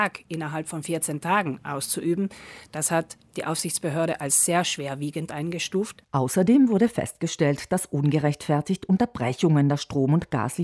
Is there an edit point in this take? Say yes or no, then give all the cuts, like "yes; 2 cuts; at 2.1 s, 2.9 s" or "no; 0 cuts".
no; 0 cuts